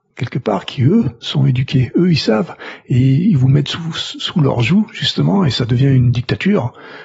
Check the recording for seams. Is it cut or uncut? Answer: uncut